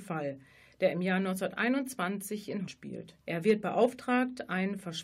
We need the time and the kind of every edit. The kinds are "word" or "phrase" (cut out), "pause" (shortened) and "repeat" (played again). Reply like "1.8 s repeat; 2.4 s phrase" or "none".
2.7 s word; 3.2 s pause